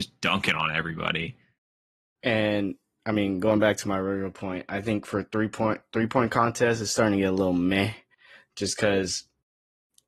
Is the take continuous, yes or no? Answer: yes